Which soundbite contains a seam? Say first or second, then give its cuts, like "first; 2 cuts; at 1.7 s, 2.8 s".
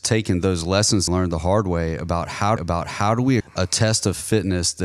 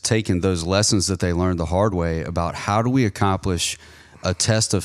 first; 3 cuts; at 1.1 s, 2.6 s, 3.4 s